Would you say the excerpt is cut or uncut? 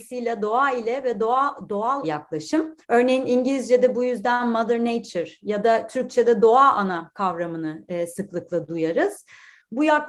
cut